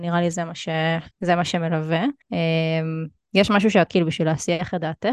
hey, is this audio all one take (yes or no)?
no